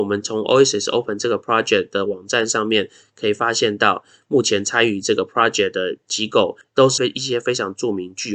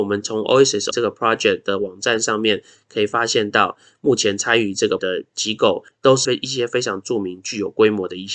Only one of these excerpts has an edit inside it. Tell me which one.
second; 2 cuts; at 0.9 s, 5.0 s

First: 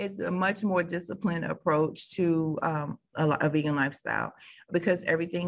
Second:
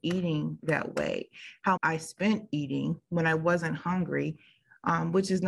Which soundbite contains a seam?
second; 1 cut; at 1.8 s

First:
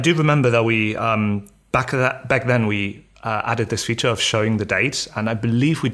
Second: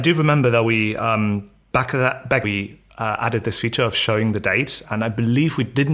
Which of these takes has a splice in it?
second; 1 cut; at 2.4 s

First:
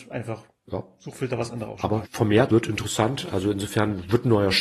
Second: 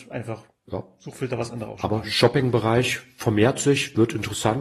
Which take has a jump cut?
first; 2 cuts; at 2.0 s, 2.5 s

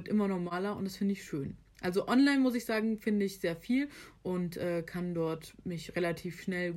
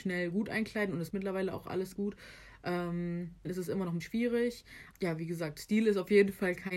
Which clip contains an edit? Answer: second; 5 cuts; at 1.1 s, 1.9 s, 3.4 s, 4.0 s, 4.9 s

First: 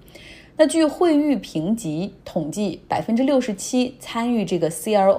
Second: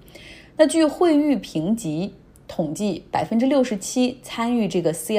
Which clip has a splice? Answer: first; 1 cut; at 2.2 s

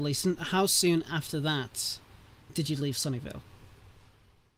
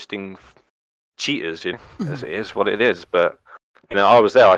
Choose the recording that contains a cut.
second; 1 cut; at 1.7 s

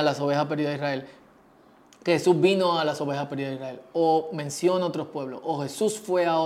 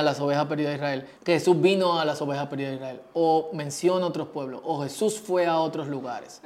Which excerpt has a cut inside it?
second; 1 cut; at 1.2 s

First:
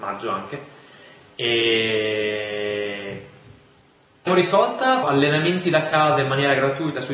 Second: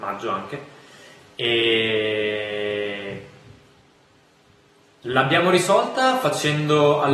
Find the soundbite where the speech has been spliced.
first; 2 cuts; at 4.3 s, 5.0 s

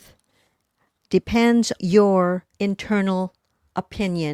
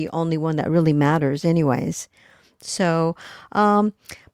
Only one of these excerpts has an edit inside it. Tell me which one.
first; 2 cuts; at 1.8 s, 2.5 s

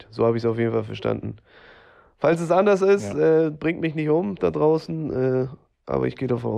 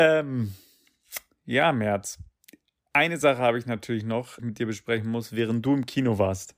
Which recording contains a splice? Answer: second; 1 cut; at 4.4 s

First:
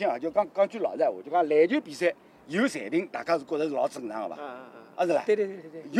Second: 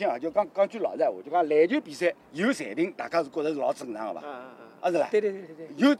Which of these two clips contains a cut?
second; 1 cut; at 2.2 s

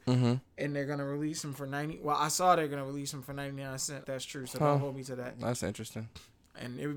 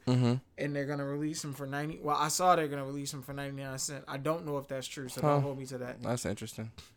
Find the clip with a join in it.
first; 1 cut; at 4.0 s

